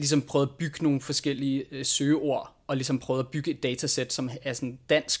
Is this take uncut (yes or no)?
yes